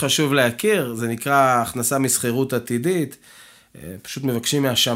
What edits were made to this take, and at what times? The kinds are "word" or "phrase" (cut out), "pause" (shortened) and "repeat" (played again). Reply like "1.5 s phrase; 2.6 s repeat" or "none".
none

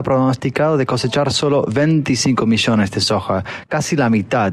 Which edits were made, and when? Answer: none

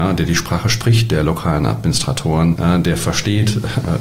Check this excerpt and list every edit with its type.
none

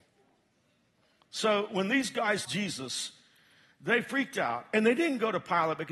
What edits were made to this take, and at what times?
2.4 s word

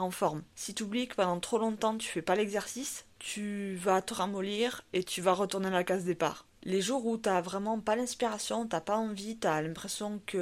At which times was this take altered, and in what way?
none

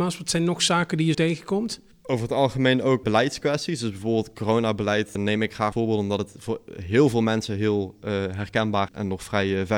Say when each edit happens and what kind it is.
1.1 s word; 3.0 s word; 5.2 s word; 5.7 s word; 8.9 s word

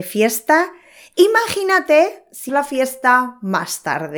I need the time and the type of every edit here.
2.5 s word

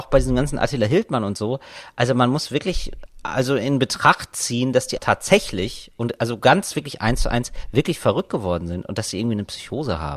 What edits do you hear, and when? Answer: 5.0 s word

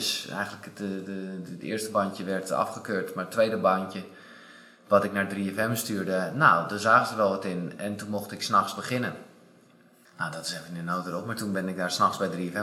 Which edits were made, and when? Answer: none

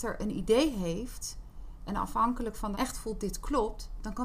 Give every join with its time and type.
2.7 s word

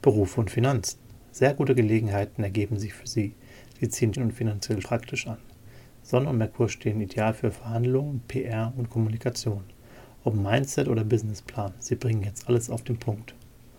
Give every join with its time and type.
4.1 s word; 4.8 s word

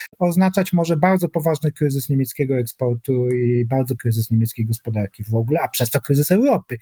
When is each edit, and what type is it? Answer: 4.0 s word

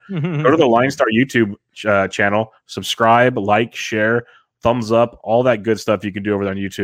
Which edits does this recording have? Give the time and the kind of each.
none

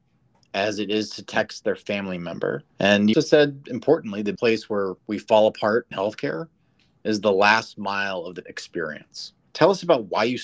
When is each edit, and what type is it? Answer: 2.7 s pause; 3.1 s word; 4.4 s word; 5.0 s pause; 5.9 s word; 8.4 s word; 9.5 s pause

